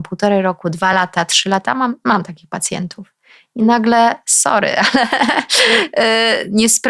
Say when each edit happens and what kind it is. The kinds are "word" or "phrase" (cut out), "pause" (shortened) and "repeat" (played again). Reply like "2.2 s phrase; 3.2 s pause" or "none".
none